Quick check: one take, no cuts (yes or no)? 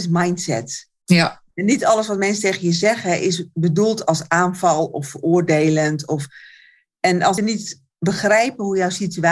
no